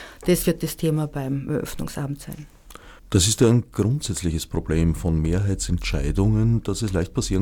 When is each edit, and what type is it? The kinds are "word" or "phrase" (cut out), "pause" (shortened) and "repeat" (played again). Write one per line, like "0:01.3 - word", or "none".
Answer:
0:03.0 - pause